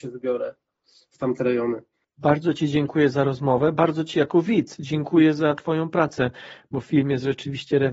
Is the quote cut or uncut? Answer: uncut